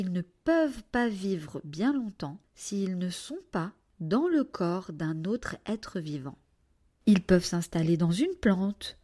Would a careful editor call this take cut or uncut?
uncut